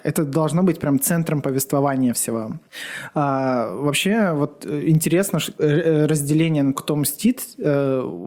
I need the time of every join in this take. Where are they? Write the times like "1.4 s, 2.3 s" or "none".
5.6 s, 6.7 s

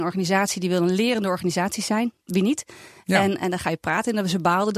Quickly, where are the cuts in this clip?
2.2 s

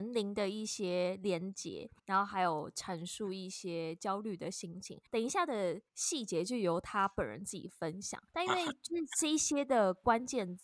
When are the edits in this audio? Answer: 2.0 s, 5.1 s, 5.9 s, 8.3 s

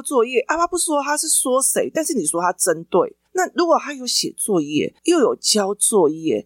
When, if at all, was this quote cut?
3.3 s, 5.0 s

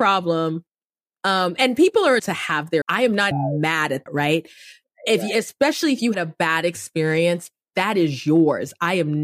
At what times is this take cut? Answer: 2.2 s, 2.8 s, 3.3 s, 4.1 s, 6.1 s, 7.7 s

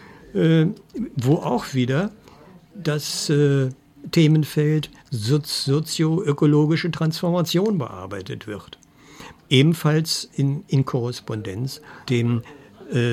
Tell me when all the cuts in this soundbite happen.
5.0 s, 9.4 s, 10.7 s, 12.0 s

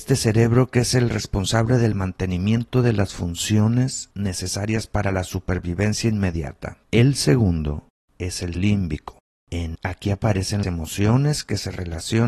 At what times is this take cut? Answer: 8.5 s, 9.7 s, 10.6 s

